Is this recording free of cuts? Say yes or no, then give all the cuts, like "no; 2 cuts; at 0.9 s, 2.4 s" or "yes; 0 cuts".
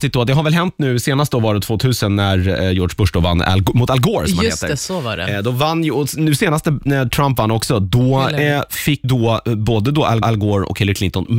no; 2 cuts; at 9.0 s, 10.2 s